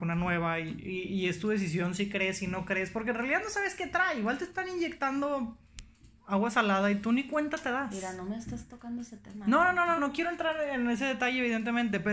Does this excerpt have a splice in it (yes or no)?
yes